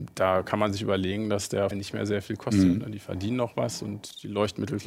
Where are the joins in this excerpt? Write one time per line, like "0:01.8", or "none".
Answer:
0:01.7

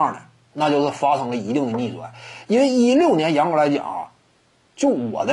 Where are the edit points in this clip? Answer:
none

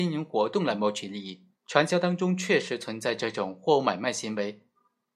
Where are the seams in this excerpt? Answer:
0:01.5

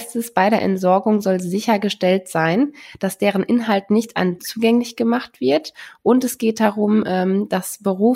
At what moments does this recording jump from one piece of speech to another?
0:04.4

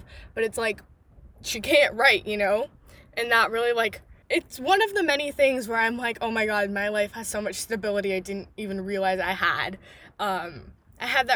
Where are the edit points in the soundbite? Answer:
0:04.2

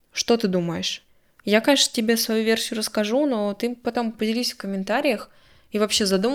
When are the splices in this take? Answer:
none

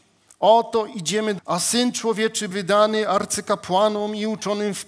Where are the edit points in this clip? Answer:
0:01.4
0:02.5

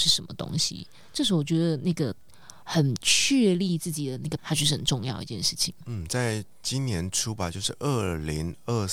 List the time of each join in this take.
0:04.4

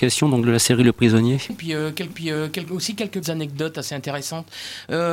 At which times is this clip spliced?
0:01.5
0:02.1
0:03.2

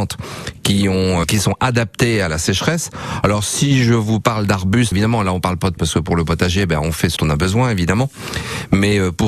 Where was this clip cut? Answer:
0:01.2
0:04.9
0:05.8
0:07.2

